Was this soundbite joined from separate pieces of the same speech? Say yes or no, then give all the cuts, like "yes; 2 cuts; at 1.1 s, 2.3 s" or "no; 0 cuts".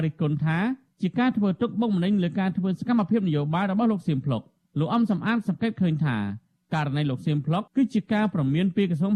yes; 1 cut; at 7.7 s